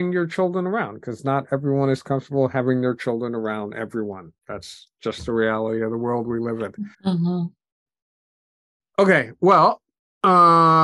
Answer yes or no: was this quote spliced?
yes